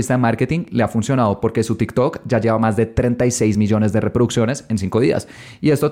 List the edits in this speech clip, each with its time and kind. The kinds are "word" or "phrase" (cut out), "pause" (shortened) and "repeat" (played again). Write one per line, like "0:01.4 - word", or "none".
none